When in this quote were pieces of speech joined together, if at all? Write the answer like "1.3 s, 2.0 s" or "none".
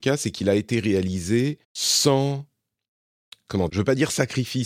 1.6 s, 3.7 s